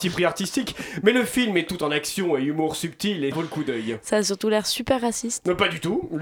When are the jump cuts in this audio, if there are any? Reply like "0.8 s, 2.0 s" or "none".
3.3 s